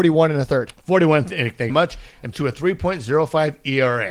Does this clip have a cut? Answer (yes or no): yes